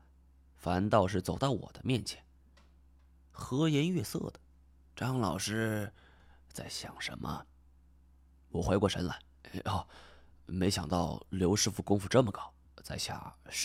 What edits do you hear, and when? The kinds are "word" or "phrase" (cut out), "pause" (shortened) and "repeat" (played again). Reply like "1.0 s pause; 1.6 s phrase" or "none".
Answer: none